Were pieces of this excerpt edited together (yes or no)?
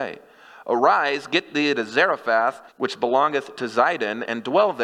yes